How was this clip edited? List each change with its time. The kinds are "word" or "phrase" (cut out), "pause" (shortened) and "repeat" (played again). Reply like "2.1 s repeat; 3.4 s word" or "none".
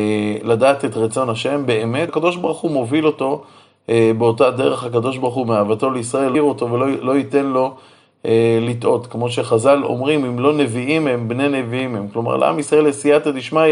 2.1 s word; 6.3 s word